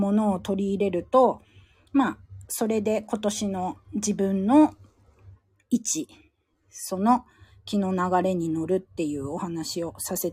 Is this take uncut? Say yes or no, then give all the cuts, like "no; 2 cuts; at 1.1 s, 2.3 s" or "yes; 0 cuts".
yes; 0 cuts